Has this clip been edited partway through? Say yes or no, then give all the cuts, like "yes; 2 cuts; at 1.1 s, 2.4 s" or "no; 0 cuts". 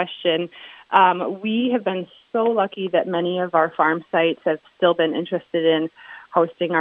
no; 0 cuts